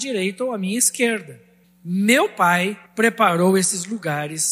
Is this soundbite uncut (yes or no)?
no